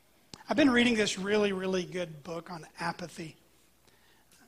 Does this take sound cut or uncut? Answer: uncut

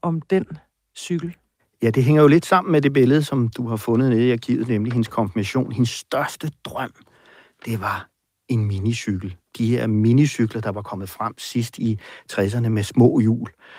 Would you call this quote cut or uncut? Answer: uncut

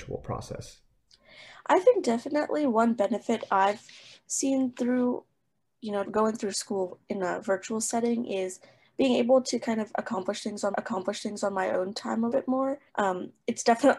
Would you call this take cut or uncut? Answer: cut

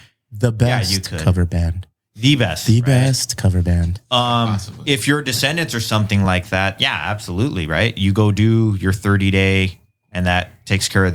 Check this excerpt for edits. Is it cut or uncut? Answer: uncut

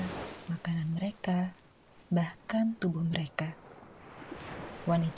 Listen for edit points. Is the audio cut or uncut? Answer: uncut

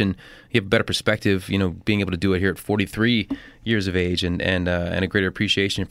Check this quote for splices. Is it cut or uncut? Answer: uncut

